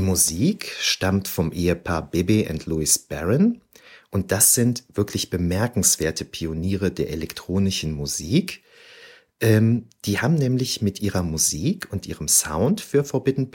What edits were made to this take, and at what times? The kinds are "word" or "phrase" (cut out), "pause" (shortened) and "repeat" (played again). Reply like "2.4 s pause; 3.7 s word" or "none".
none